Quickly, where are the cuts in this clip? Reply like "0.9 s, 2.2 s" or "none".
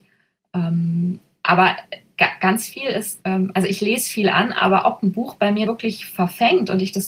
3.2 s, 5.7 s